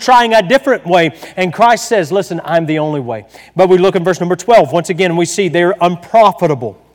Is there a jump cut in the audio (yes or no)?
no